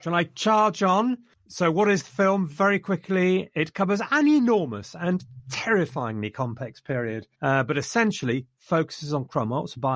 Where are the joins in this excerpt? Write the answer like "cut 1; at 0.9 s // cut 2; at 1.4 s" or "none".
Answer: cut 1; at 7.3 s